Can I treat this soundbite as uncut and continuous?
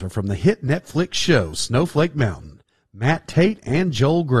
yes; 0 cuts

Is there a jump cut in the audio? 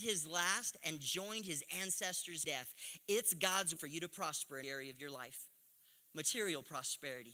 yes; 3 cuts; at 2.4 s, 3.8 s, 4.6 s

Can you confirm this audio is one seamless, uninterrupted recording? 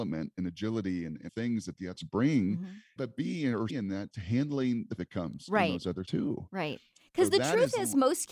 no; 7 cuts; at 1.3 s, 1.9 s, 3.0 s, 3.7 s, 4.1 s, 5.0 s, 6.1 s

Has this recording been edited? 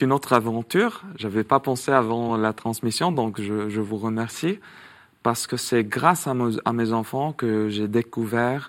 no; 0 cuts

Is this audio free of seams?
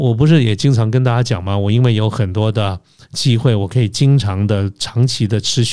yes; 0 cuts

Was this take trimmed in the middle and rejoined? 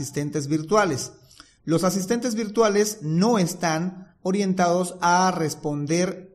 no; 0 cuts

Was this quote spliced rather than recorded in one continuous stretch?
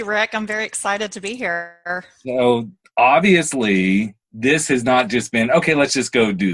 yes; 1 cut; at 4.2 s

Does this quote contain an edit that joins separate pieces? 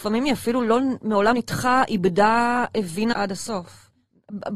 yes; 2 cuts; at 1.3 s, 3.1 s

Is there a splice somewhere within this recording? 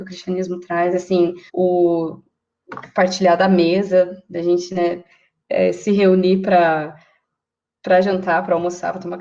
yes; 1 cut; at 1.5 s

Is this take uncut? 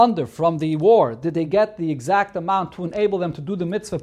yes; 0 cuts

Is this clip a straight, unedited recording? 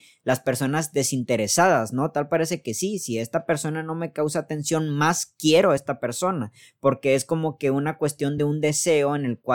yes; 0 cuts

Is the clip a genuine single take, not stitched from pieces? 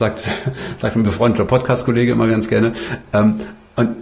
yes; 0 cuts

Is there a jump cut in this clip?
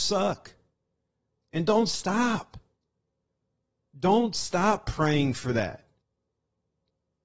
no; 0 cuts

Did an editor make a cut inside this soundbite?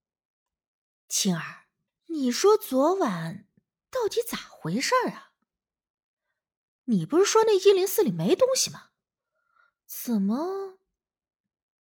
yes; 1 cut; at 1.9 s

